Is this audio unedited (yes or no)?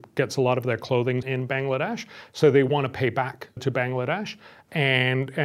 no